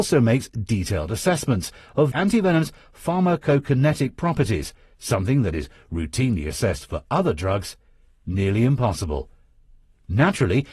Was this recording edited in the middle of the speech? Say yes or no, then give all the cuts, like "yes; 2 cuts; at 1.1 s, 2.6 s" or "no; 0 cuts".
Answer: yes; 1 cut; at 2.1 s